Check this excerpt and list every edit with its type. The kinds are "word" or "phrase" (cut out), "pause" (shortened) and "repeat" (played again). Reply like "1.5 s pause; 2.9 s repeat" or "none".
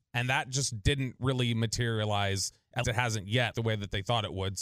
2.8 s word; 3.5 s word